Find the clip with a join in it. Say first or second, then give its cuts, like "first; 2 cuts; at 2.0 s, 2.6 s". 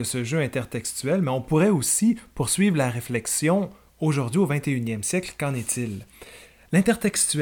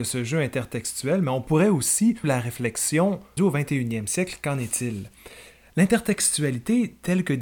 second; 2 cuts; at 2.2 s, 3.4 s